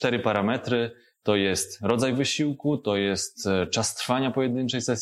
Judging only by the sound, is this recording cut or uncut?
uncut